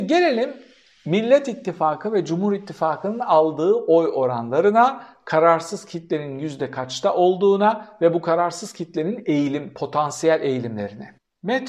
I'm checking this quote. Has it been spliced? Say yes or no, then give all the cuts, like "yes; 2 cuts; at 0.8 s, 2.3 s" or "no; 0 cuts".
no; 0 cuts